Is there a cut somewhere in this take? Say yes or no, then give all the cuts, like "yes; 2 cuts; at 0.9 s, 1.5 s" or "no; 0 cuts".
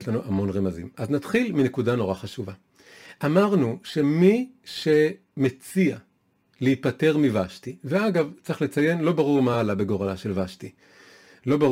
no; 0 cuts